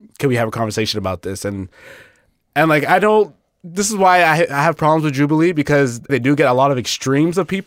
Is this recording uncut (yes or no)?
no